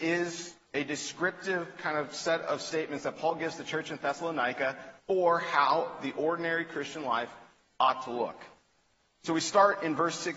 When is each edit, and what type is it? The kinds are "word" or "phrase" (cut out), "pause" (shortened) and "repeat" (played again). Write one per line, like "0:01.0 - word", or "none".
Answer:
0:05.0 - pause